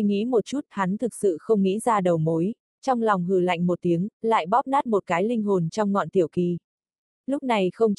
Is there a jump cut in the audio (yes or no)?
yes